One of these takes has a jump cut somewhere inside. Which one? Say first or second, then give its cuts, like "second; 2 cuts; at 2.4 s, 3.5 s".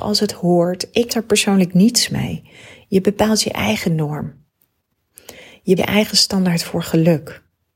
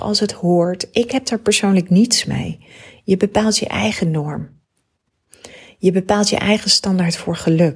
first; 2 cuts; at 1.1 s, 5.8 s